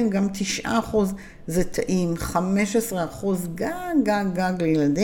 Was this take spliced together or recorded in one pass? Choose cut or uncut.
uncut